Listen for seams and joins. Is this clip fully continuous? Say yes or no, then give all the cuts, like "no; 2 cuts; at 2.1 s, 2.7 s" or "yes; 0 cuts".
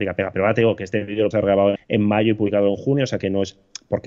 no; 2 cuts; at 1.3 s, 1.8 s